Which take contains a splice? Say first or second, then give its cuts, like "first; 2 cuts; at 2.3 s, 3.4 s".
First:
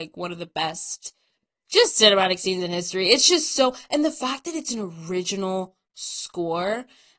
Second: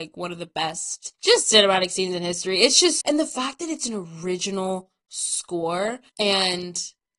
second; 3 cuts; at 1.1 s, 3.0 s, 6.1 s